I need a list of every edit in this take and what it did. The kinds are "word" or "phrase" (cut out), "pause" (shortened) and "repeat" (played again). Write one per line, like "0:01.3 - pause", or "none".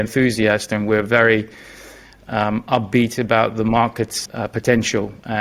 0:04.3 - word